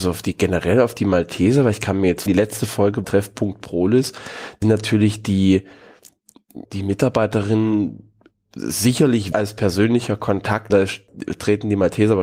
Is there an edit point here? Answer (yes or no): yes